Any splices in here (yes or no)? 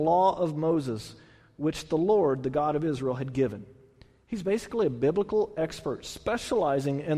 no